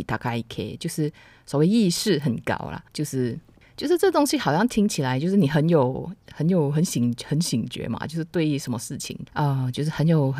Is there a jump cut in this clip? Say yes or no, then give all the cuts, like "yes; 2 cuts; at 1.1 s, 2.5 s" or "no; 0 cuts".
yes; 3 cuts; at 2.9 s, 3.6 s, 9.3 s